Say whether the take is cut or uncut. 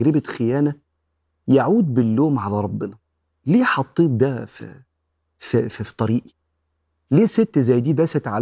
uncut